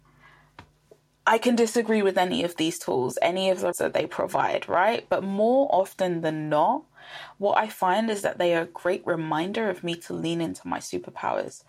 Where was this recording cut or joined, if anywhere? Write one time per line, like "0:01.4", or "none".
0:03.7